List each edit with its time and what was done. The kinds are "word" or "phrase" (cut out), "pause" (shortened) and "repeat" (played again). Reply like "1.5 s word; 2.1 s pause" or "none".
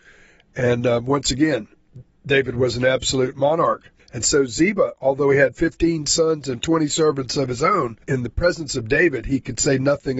4.0 s pause; 8.0 s pause